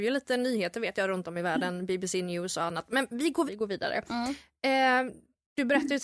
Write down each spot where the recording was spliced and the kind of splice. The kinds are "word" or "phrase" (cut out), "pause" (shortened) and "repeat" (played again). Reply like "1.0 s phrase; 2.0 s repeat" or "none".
3.5 s word

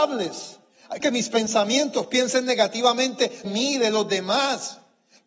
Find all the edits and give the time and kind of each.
1.0 s phrase; 3.4 s word

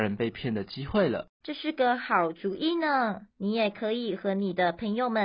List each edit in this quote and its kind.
1.3 s pause; 3.3 s pause

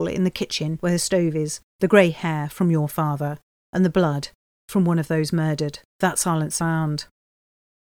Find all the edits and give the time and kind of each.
6.6 s word

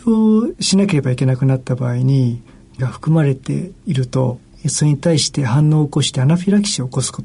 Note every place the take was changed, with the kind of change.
2.8 s phrase

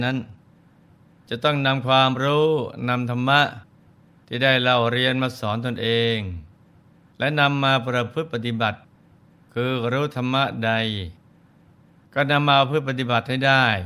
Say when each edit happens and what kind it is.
none

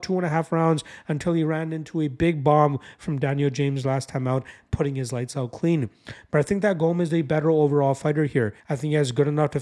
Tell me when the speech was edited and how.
8.6 s pause

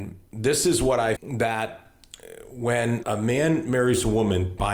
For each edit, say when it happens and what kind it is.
1.1 s word; 3.0 s word

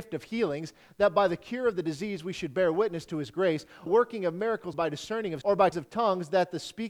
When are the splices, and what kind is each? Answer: 3.9 s phrase; 4.7 s phrase; 5.4 s word; 5.7 s word

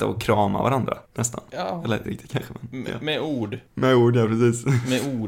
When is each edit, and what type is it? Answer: 1.0 s pause; 2.0 s word; 3.7 s pause

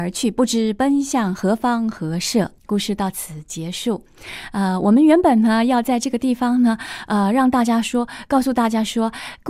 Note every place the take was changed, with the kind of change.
2.6 s pause

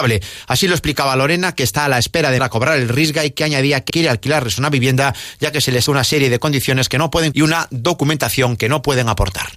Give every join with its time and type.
2.4 s word; 3.9 s word; 5.9 s word; 7.3 s word

